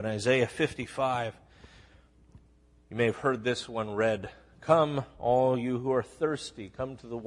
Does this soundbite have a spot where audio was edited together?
no; 0 cuts

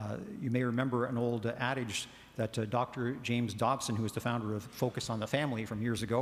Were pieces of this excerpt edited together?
no; 0 cuts

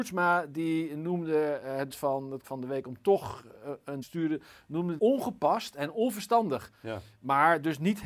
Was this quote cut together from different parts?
yes; 4 cuts; at 1.9 s, 2.4 s, 4.0 s, 5.0 s

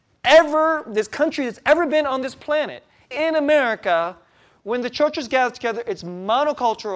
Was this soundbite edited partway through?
yes; 1 cut; at 3.1 s

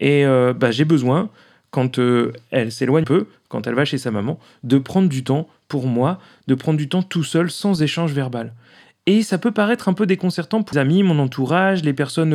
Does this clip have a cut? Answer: yes; 2 cuts; at 3.0 s, 10.7 s

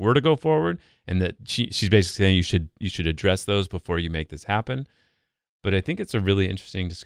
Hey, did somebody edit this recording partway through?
no; 0 cuts

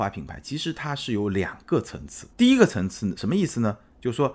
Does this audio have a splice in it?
yes; 1 cut; at 2.3 s

